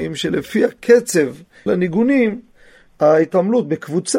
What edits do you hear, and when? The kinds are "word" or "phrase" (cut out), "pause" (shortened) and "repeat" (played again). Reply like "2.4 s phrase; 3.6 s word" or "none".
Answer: 1.7 s word